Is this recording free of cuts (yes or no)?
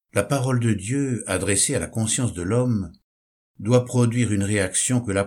yes